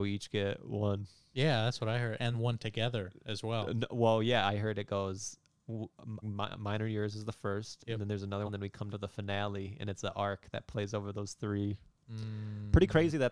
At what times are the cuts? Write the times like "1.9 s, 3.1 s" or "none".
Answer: 2.3 s, 6.2 s, 8.5 s, 8.9 s